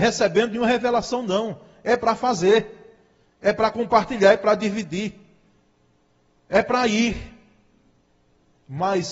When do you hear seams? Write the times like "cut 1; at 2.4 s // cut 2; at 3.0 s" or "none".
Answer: none